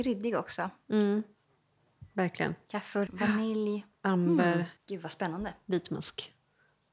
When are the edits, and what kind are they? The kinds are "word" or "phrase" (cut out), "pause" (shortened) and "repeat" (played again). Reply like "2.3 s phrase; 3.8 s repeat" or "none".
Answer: 3.1 s word; 3.9 s pause; 4.8 s pause